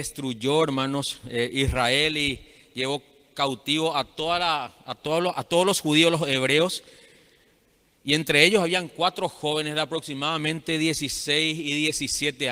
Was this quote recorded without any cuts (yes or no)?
yes